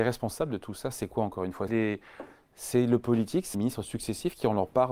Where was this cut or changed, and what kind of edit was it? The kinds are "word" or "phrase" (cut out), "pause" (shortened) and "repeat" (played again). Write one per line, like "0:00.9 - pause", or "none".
0:01.7 - word
0:03.5 - word